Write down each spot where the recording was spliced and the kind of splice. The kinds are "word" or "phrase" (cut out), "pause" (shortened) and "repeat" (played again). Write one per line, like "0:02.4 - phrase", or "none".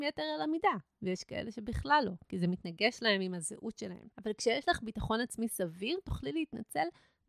0:04.1 - pause